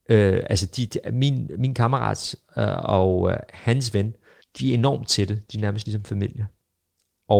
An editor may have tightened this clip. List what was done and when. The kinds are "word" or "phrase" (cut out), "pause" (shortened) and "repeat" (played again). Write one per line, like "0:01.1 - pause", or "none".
0:04.4 - pause